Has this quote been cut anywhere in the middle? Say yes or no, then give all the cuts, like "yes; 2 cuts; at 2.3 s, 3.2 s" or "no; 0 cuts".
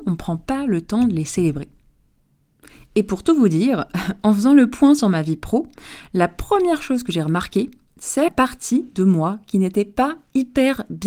yes; 1 cut; at 8.3 s